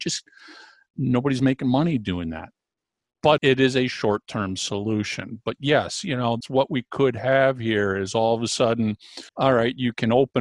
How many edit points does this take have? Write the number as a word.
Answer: three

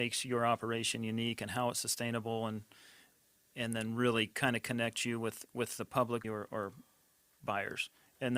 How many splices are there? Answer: one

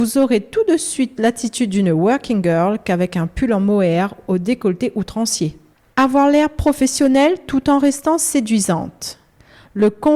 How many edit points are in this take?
two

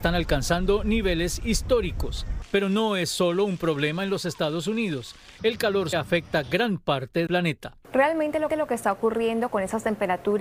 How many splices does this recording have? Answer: four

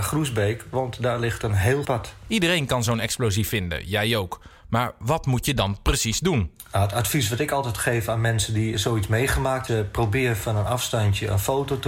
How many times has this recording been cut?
three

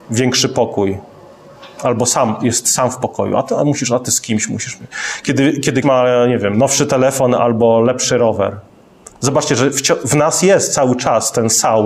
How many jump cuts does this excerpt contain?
one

